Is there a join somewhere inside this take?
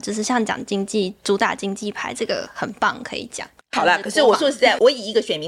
yes; 1 cut; at 3.6 s

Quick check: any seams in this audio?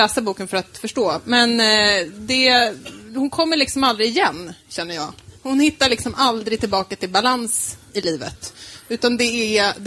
no; 0 cuts

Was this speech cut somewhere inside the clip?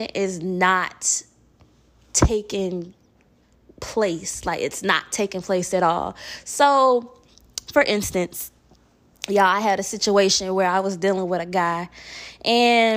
no; 0 cuts

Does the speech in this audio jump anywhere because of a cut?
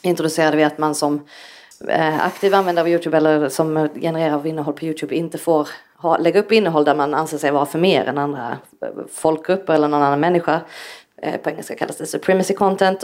no; 0 cuts

